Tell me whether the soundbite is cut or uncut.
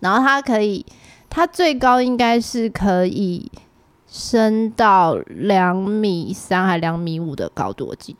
uncut